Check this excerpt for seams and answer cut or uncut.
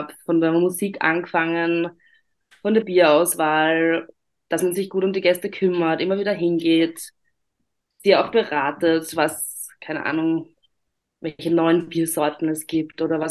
uncut